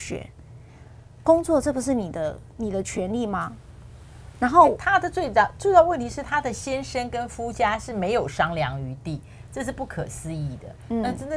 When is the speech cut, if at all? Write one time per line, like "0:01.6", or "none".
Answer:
none